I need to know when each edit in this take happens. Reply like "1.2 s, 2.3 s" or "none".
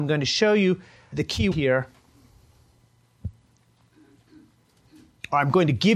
1.1 s, 1.5 s